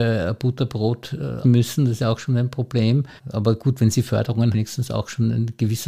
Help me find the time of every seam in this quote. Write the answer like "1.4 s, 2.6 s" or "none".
1.4 s, 2.0 s, 3.2 s, 4.5 s